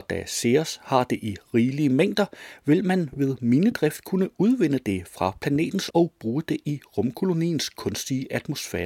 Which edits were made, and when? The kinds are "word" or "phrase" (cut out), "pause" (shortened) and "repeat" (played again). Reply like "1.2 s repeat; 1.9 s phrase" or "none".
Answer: 5.9 s word